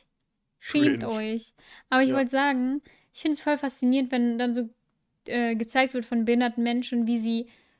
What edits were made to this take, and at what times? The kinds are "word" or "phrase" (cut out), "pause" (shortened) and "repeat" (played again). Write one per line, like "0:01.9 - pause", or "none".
none